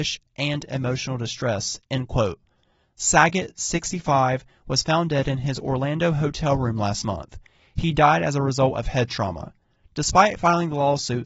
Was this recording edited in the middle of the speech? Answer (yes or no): no